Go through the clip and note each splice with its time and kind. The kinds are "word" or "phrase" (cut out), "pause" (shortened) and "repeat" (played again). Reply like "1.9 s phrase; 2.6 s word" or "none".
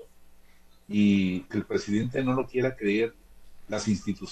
1.5 s word